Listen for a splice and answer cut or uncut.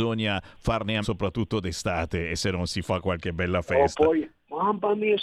cut